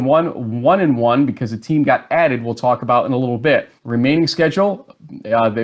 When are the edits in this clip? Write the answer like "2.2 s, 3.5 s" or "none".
3.8 s